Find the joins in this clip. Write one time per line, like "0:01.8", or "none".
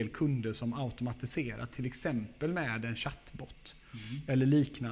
none

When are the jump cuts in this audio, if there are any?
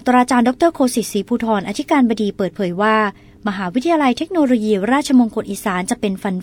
none

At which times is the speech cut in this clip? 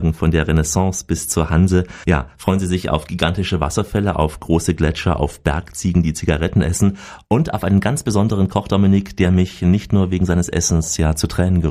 none

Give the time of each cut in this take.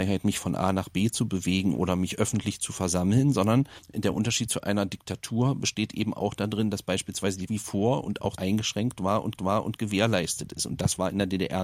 0:07.5
0:08.4
0:09.4

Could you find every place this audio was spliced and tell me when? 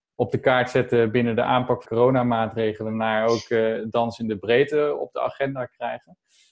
0:01.8

